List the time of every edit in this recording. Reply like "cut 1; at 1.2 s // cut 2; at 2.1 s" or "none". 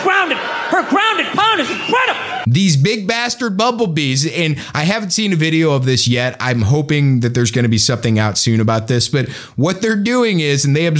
none